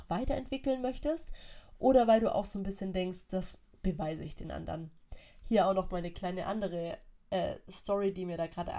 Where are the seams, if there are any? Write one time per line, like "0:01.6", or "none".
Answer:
none